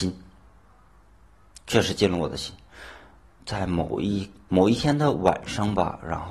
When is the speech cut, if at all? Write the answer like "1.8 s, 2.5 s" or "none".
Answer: none